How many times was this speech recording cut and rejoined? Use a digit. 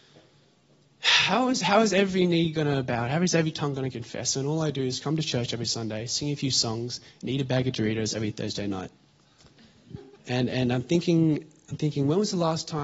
1